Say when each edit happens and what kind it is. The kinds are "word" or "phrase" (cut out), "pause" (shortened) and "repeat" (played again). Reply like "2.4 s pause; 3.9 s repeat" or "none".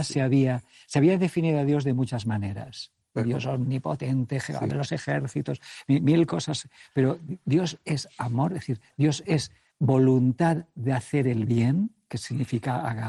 none

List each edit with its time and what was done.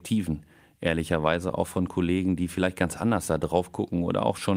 none

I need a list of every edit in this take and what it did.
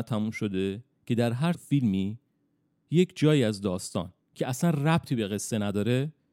1.5 s word; 4.2 s pause

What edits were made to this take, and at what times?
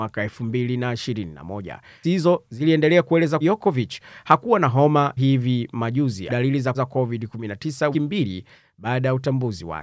2.0 s word; 3.4 s word; 5.2 s word; 6.3 s word; 6.7 s word; 7.9 s word

